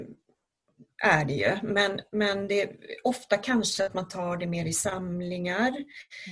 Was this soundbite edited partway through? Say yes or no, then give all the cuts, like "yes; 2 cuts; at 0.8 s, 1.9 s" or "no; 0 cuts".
no; 0 cuts